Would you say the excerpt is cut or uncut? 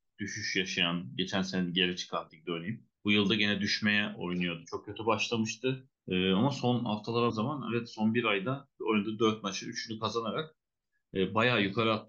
cut